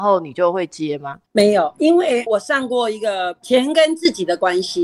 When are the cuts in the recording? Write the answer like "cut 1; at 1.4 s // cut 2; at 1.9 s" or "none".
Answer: cut 1; at 1.3 s